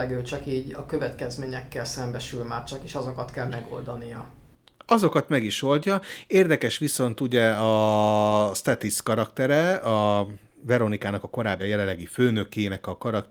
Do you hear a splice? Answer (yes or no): yes